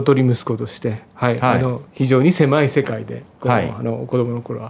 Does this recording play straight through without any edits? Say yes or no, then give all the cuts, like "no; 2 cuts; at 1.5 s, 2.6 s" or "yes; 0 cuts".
no; 1 cut; at 1.9 s